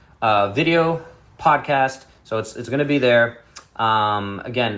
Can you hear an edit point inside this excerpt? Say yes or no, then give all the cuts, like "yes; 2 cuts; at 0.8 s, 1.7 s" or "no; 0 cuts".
no; 0 cuts